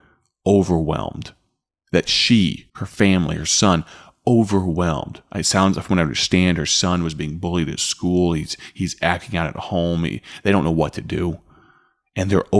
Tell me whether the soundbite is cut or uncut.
cut